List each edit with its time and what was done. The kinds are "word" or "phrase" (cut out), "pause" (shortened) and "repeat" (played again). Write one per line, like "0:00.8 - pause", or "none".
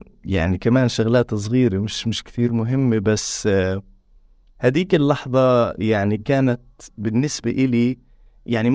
none